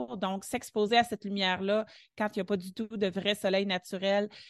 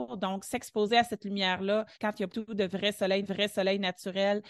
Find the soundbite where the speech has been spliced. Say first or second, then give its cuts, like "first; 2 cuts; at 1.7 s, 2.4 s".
second; 3 cuts; at 1.9 s, 2.3 s, 3.2 s